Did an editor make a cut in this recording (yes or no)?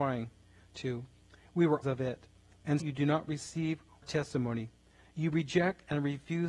yes